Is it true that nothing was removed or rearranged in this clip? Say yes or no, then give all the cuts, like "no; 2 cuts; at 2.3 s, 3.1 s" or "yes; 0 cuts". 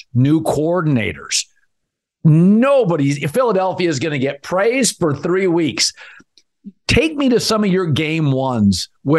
yes; 0 cuts